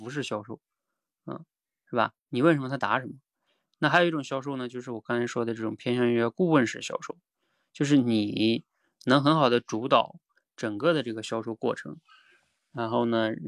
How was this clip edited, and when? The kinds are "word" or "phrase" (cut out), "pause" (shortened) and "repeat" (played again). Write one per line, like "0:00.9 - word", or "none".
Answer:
none